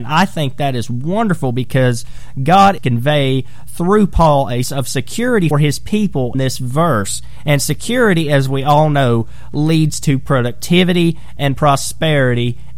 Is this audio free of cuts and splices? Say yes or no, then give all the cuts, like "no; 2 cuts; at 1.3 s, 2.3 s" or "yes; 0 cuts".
no; 4 cuts; at 2.8 s, 4.6 s, 5.5 s, 6.3 s